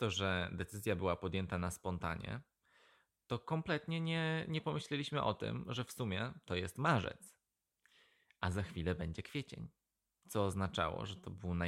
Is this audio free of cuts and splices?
yes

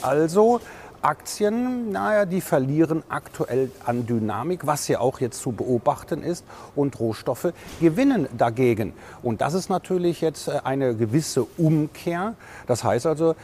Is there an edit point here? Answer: no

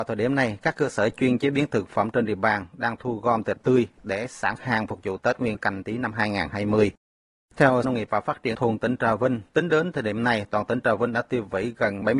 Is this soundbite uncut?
no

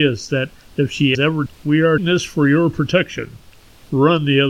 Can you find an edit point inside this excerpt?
yes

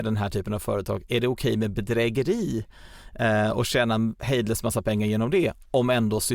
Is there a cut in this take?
no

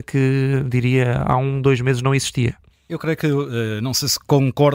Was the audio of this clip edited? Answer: no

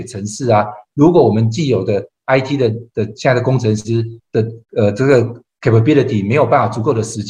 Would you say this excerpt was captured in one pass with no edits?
no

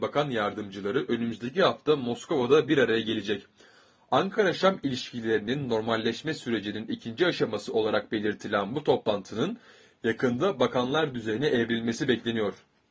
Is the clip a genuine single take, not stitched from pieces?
yes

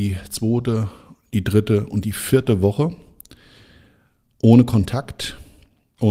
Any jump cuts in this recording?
no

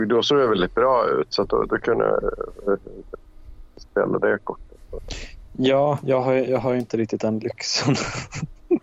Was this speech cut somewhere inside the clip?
no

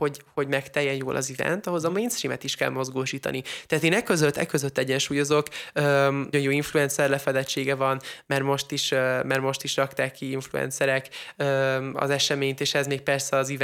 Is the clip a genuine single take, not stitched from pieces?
no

